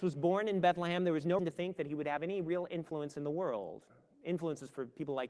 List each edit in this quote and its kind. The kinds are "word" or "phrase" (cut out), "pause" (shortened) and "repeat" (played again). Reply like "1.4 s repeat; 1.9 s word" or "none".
1.4 s word